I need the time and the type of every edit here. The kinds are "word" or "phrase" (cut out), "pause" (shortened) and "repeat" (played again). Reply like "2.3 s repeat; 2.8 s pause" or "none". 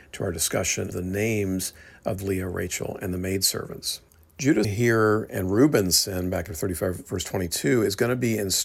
0.9 s word; 2.2 s phrase; 4.6 s word; 6.5 s word